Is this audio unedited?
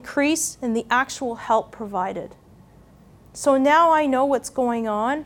yes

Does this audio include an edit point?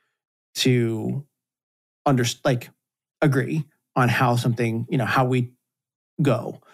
no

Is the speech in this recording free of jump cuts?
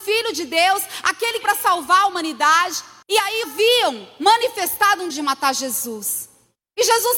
no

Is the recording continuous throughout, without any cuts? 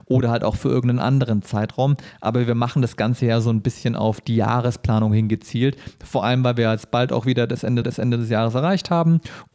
no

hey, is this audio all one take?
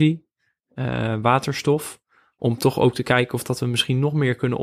yes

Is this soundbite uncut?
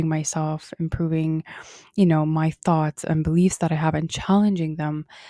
yes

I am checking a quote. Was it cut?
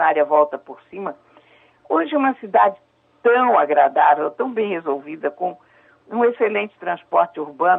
no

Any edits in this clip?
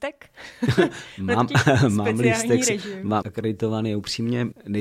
yes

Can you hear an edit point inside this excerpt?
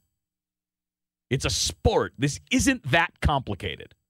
no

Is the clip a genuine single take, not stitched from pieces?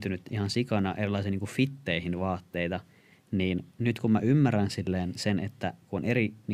yes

